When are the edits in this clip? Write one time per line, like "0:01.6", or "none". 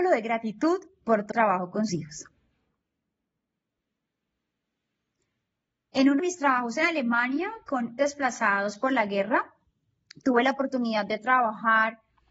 0:01.3
0:01.9
0:06.2
0:08.0